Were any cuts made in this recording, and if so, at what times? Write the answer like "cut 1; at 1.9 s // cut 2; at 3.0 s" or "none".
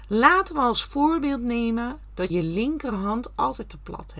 cut 1; at 2.3 s